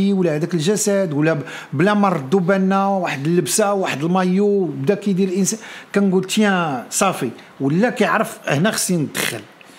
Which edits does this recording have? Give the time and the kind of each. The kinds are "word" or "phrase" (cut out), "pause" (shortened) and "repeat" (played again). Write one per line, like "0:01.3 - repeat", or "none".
none

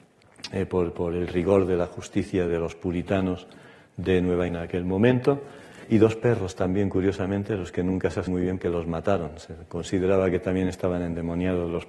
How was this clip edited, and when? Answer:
0:02.5 - word
0:04.5 - word
0:05.8 - word
0:08.3 - word
0:08.6 - word

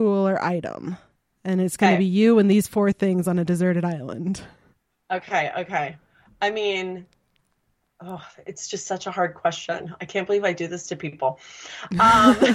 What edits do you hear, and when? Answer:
none

